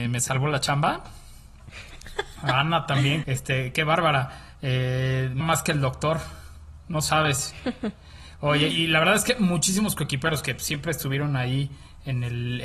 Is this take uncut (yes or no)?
no